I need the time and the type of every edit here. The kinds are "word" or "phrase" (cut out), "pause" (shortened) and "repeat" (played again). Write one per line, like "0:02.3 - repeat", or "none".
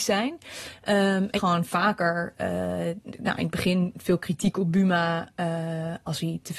0:01.4 - phrase